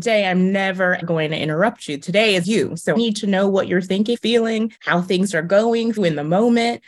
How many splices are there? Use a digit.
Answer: 5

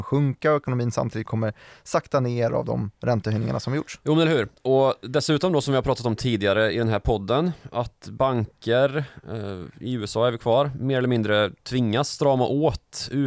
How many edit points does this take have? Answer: 0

